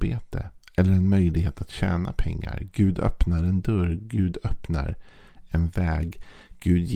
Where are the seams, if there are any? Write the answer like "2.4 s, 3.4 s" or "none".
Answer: none